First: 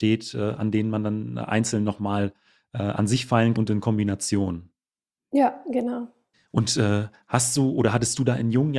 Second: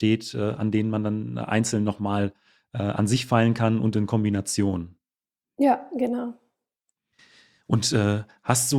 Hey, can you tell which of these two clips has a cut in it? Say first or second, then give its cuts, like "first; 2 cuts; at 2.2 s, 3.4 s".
first; 2 cuts; at 3.5 s, 6.3 s